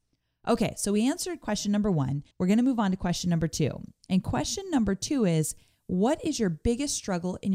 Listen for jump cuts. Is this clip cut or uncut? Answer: cut